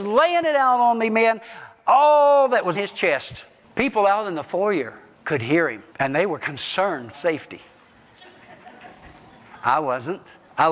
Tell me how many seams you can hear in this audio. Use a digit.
3